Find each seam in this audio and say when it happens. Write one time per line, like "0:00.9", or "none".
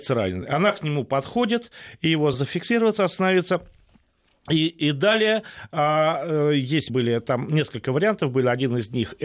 0:02.3
0:06.9